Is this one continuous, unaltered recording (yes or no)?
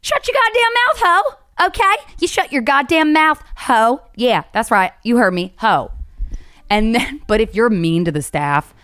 yes